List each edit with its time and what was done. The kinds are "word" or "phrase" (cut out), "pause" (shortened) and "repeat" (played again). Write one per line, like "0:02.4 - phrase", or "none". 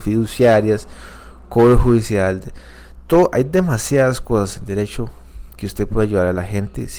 none